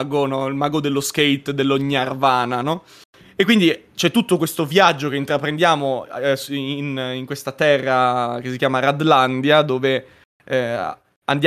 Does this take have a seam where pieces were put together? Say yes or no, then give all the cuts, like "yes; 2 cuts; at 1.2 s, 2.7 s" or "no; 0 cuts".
no; 0 cuts